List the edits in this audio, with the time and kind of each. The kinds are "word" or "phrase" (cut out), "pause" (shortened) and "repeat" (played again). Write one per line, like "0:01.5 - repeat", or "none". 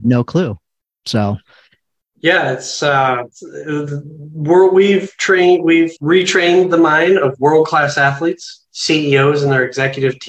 0:03.3 - pause
0:06.0 - pause
0:08.7 - pause